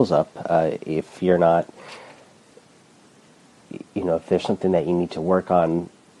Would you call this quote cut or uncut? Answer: uncut